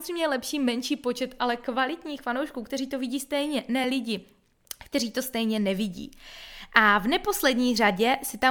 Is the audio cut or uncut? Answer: uncut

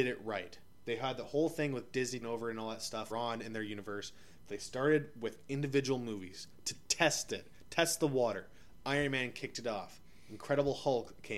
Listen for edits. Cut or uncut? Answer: cut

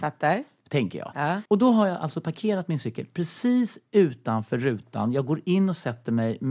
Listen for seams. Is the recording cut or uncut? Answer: cut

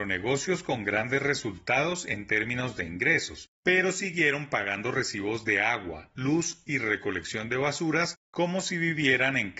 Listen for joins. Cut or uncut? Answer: uncut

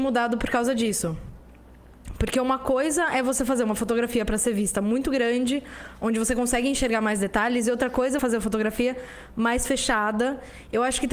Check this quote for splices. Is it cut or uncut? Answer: cut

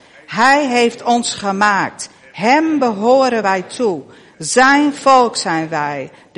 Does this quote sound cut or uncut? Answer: uncut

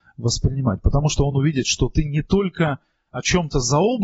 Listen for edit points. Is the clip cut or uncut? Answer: uncut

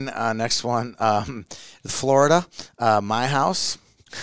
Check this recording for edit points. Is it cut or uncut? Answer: cut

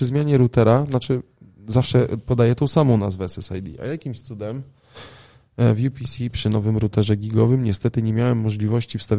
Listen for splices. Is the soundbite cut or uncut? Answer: uncut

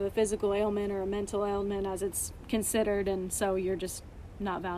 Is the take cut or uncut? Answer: uncut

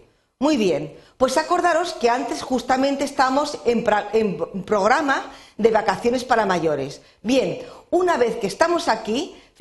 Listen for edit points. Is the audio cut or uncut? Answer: uncut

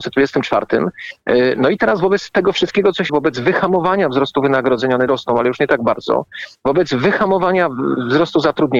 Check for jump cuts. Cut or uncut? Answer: cut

